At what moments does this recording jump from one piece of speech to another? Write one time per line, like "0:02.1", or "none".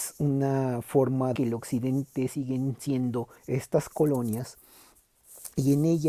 0:01.4
0:03.4

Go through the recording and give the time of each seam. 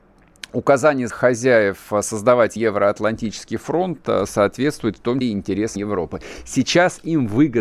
0:01.1
0:02.6
0:05.2
0:05.8

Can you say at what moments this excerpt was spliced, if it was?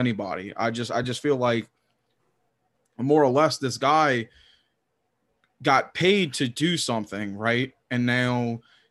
none

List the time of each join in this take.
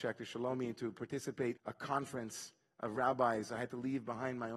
0:01.6

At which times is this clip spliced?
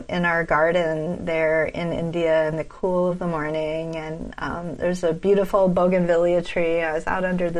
none

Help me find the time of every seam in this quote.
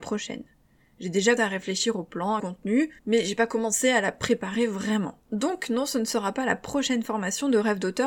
0:01.4
0:02.4
0:03.0
0:05.2

